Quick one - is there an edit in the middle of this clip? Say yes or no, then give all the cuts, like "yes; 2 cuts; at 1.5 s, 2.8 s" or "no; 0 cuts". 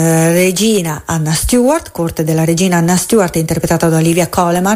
no; 0 cuts